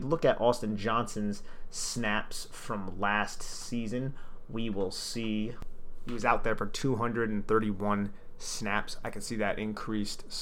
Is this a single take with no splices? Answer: yes; 0 cuts

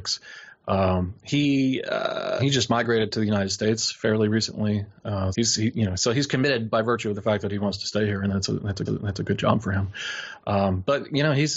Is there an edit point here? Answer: yes; 3 cuts; at 2.4 s, 5.3 s, 8.9 s

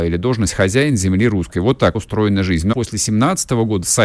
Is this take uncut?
no; 2 cuts; at 1.9 s, 2.7 s

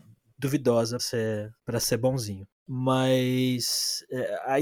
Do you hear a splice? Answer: yes; 2 cuts; at 1.0 s, 1.6 s

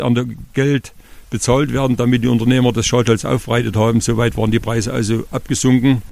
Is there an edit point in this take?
no; 0 cuts

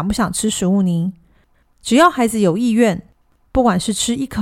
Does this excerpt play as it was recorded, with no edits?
yes; 0 cuts

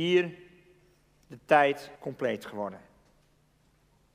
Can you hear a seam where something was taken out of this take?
yes; 1 cut; at 2.0 s

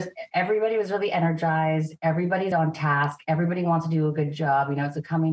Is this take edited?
yes; 1 cut; at 2.5 s

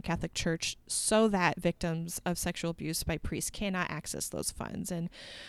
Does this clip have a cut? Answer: no; 0 cuts

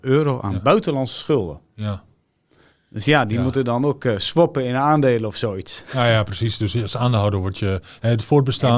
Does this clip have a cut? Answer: no; 0 cuts

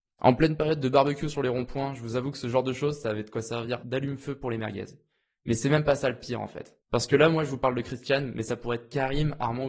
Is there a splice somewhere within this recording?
yes; 1 cut; at 6.8 s

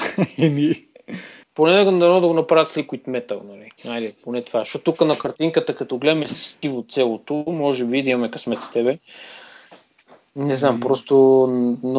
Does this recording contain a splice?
yes; 2 cuts; at 1.4 s, 3.8 s

